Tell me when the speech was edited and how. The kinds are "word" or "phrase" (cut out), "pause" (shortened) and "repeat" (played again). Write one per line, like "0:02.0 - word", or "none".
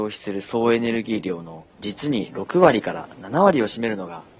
0:01.7 - pause